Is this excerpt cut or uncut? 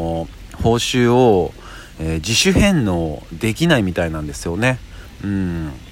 uncut